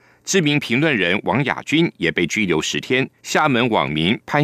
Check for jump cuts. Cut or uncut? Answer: cut